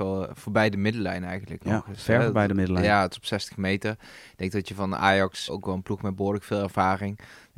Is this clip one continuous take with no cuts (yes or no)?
no